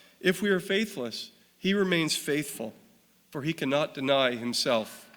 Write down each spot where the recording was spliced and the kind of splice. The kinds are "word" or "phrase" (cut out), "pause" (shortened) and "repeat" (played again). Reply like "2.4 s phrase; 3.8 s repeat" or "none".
none